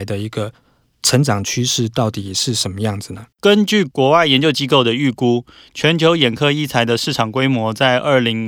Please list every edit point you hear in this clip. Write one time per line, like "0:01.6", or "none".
0:03.3